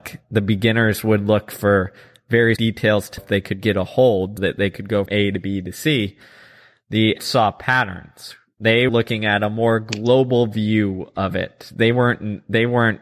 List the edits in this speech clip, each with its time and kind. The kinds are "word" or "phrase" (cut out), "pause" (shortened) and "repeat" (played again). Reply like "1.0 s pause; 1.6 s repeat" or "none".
2.6 s word; 3.2 s word; 4.4 s word; 5.1 s word; 7.2 s word; 8.9 s word

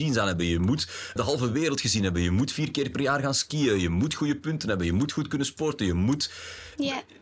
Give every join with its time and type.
1.2 s word

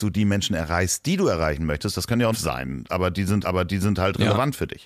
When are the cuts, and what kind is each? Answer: 2.3 s phrase; 3.4 s repeat

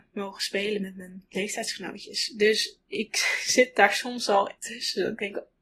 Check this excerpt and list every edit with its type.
4.6 s pause

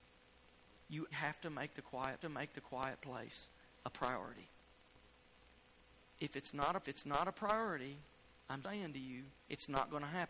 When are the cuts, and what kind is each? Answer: 1.1 s word; 2.2 s repeat; 6.8 s repeat; 8.6 s word; 9.4 s pause

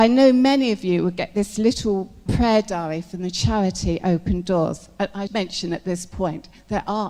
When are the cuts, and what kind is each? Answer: 2.3 s word; 5.3 s word

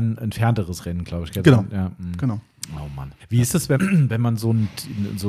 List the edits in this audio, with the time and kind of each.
3.2 s pause; 3.8 s word

